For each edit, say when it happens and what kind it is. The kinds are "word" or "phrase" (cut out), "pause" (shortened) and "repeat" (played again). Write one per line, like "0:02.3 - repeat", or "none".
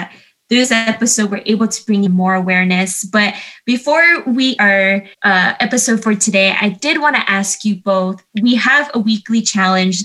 0:02.1 - word
0:04.6 - word
0:05.1 - pause
0:08.3 - pause